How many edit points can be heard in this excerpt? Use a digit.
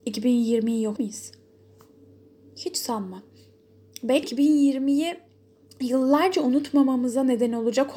2